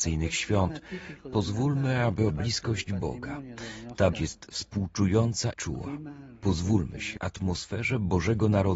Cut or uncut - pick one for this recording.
cut